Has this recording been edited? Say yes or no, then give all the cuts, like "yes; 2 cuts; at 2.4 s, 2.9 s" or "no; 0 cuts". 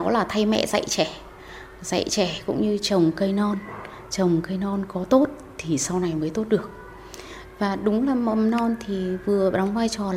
no; 0 cuts